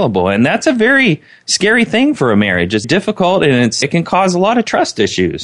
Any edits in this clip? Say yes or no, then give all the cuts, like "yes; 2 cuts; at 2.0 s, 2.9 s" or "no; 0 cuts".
yes; 2 cuts; at 2.8 s, 3.8 s